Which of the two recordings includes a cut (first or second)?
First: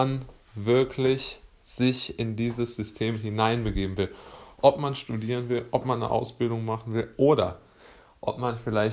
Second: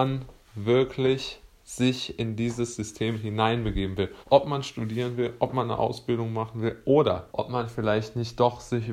second